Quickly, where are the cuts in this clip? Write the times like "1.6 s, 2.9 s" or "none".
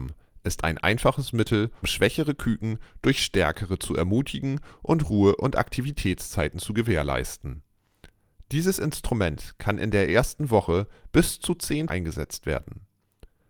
1.8 s, 11.9 s